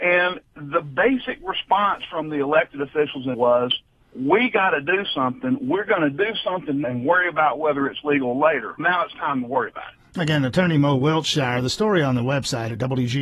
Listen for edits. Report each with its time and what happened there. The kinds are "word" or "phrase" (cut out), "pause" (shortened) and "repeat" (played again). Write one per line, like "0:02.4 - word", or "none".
0:03.3 - word
0:06.8 - word
0:08.8 - word

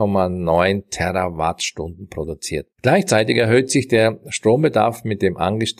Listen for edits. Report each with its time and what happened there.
0:02.7 - pause

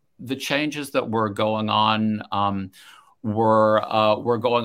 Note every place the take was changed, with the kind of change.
none

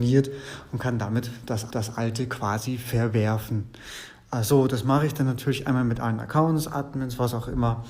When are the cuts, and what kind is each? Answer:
0:01.7 - repeat

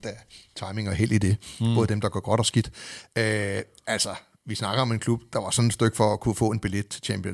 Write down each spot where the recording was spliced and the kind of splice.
none

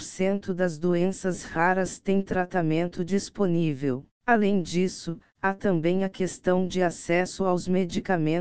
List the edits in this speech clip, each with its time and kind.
0:04.1 - pause

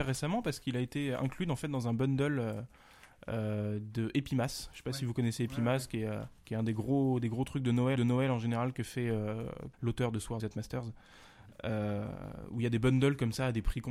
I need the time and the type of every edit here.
0:06.4 - pause
0:08.0 - repeat
0:09.7 - phrase
0:10.4 - word

